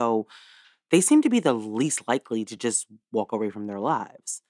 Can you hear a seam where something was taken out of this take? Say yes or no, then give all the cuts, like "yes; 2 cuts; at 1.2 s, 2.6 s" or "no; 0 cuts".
no; 0 cuts